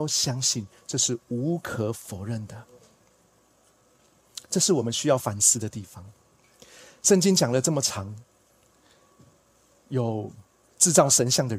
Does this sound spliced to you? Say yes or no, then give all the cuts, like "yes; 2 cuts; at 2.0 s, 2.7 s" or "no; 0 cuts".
no; 0 cuts